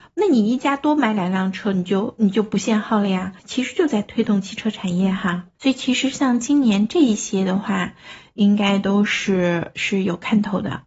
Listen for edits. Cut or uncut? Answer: cut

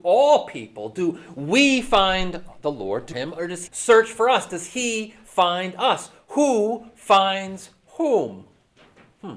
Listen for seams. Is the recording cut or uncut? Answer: cut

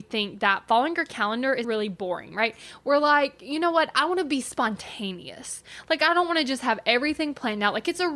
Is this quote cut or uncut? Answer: cut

